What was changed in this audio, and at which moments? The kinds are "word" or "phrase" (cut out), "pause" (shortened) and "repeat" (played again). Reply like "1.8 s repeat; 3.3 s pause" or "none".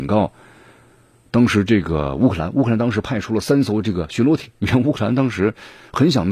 4.5 s pause